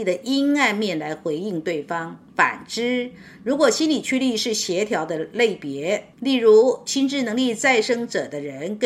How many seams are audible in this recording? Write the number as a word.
two